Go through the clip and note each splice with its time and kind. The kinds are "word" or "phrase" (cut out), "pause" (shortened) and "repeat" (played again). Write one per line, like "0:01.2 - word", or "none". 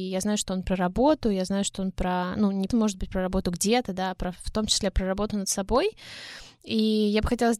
0:02.7 - word